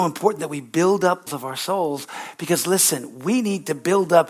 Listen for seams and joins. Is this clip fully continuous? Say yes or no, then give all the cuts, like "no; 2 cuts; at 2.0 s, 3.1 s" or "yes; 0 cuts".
no; 1 cut; at 1.3 s